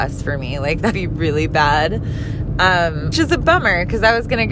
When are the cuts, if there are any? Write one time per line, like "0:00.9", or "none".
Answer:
0:00.9
0:03.1